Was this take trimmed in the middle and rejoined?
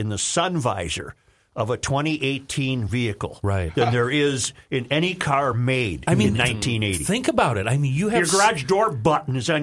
no; 0 cuts

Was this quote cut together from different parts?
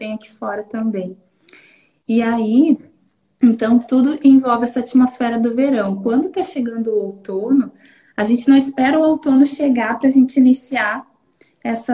no; 0 cuts

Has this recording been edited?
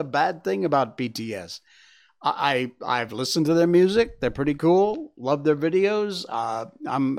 no; 0 cuts

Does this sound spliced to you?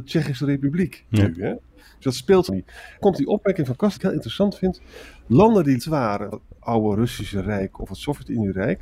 yes; 5 cuts; at 2.5 s, 3.0 s, 4.0 s, 5.8 s, 6.3 s

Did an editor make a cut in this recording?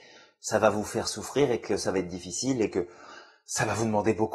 no; 0 cuts

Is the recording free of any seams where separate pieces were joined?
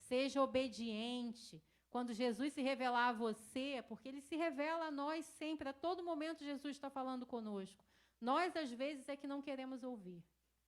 yes; 0 cuts

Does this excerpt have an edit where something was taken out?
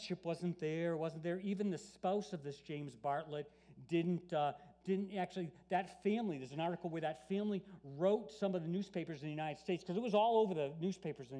no; 0 cuts

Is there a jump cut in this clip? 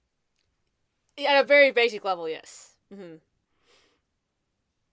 no; 0 cuts

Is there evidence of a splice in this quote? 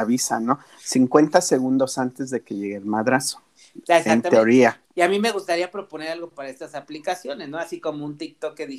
yes; 1 cut; at 4.9 s

